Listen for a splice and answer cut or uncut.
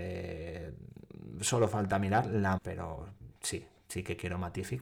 cut